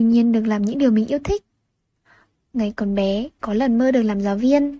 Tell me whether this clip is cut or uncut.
uncut